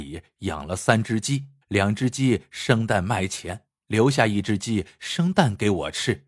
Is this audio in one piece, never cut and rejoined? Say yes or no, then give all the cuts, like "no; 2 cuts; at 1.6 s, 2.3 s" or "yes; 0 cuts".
no; 2 cuts; at 1.6 s, 3.8 s